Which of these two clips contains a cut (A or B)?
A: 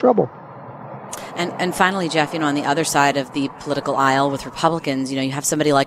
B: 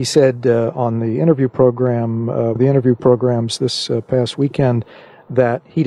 B